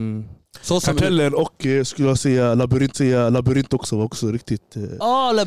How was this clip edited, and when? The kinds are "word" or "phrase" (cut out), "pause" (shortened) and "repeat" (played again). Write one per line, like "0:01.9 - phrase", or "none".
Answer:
0:02.9 - repeat